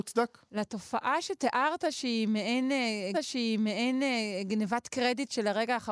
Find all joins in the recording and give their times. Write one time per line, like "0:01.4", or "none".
0:03.1